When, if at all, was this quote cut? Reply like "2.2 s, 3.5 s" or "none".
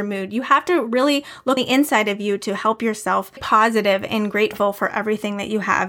1.6 s, 3.4 s